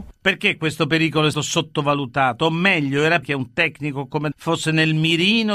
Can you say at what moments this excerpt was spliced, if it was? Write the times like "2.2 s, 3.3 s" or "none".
1.3 s, 3.2 s, 4.3 s